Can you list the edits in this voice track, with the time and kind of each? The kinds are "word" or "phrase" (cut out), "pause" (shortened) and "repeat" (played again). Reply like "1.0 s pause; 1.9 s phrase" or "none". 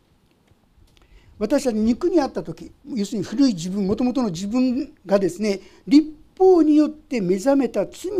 2.8 s pause; 5.0 s pause